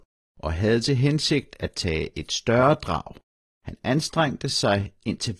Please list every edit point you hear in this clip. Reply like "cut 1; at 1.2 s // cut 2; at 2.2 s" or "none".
none